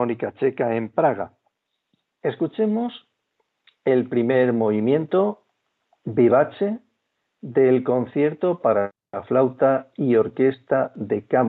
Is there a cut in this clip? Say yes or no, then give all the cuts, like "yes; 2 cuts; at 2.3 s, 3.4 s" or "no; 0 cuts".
no; 0 cuts